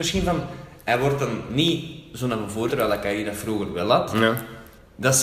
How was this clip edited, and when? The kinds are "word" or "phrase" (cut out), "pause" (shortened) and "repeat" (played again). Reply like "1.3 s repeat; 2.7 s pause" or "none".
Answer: 2.7 s word